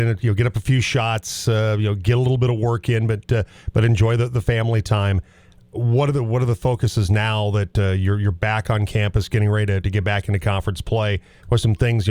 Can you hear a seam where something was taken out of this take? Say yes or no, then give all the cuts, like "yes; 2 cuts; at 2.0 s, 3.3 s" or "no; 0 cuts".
no; 0 cuts